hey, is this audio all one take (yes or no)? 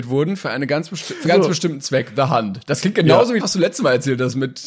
no